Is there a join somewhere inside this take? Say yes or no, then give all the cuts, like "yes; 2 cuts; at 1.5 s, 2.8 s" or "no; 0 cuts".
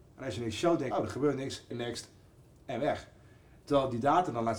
yes; 2 cuts; at 0.9 s, 1.7 s